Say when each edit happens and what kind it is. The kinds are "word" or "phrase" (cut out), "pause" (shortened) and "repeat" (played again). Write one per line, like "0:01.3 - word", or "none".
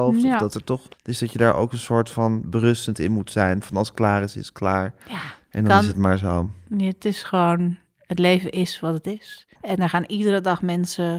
0:00.9 - pause
0:05.0 - pause
0:09.5 - pause